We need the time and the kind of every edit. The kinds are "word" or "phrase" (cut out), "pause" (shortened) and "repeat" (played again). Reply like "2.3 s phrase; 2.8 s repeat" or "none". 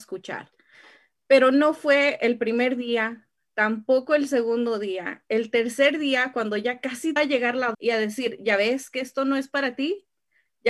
7.2 s phrase; 7.7 s word